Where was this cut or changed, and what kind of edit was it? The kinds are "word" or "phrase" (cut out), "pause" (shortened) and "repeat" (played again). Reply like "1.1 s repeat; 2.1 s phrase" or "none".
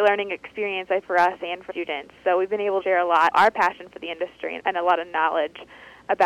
1.0 s word; 1.7 s word; 2.8 s word; 3.3 s word; 4.6 s word